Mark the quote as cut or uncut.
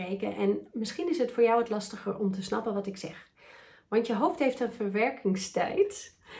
uncut